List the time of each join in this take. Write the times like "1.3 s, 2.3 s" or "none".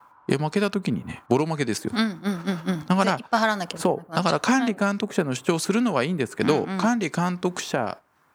1.2 s